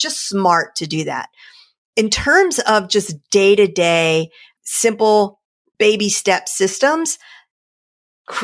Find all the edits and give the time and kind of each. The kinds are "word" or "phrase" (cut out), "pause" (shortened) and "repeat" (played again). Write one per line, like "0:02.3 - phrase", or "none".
none